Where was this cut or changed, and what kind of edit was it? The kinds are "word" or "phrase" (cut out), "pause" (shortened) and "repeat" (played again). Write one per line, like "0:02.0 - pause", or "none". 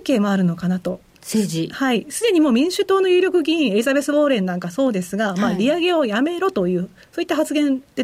none